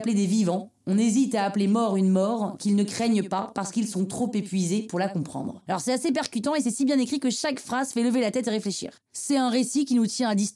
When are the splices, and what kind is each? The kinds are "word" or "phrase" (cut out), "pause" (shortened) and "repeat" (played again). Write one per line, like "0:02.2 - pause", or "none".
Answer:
none